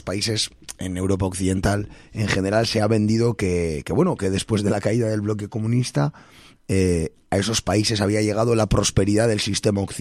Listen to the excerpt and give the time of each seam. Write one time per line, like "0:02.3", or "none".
none

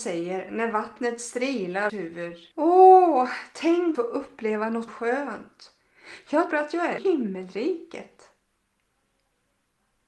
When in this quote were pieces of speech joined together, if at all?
0:01.9
0:02.5
0:03.9
0:04.9
0:06.5
0:07.0

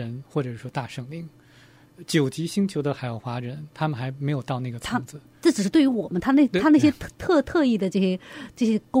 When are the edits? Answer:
0:07.1

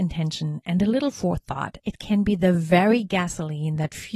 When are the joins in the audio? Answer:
none

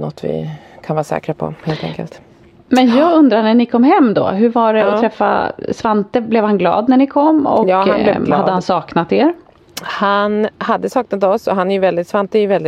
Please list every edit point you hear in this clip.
none

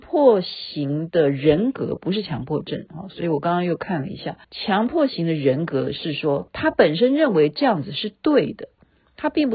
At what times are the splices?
0:04.4

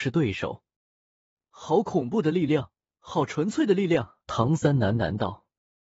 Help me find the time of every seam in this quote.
0:04.2

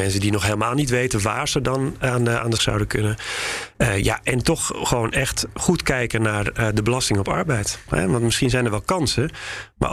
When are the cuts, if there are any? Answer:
0:02.6

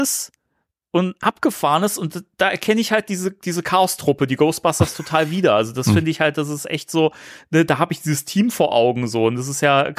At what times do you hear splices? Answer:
none

